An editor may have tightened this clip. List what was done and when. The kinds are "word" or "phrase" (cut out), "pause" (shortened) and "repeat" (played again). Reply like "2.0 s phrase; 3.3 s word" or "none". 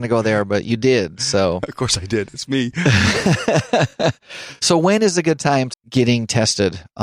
5.7 s word